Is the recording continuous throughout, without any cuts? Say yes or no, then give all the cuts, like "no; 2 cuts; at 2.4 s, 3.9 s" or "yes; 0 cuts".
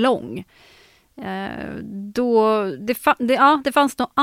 yes; 0 cuts